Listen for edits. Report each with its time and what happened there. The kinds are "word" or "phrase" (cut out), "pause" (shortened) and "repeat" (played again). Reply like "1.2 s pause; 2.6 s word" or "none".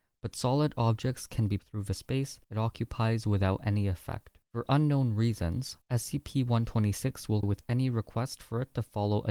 1.6 s word; 2.4 s pause; 4.4 s pause; 5.8 s pause; 7.4 s word